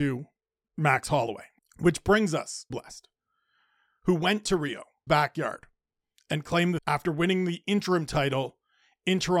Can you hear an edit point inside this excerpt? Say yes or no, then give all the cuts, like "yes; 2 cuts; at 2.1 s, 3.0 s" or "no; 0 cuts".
yes; 4 cuts; at 1.6 s, 2.7 s, 5.1 s, 6.8 s